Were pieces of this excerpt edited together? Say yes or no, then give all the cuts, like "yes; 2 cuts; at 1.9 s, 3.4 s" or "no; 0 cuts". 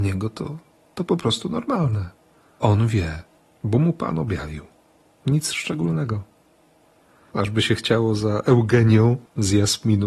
no; 0 cuts